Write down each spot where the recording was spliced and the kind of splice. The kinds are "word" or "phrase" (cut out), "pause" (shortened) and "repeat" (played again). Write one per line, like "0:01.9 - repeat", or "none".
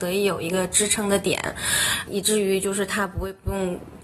0:02.1 - word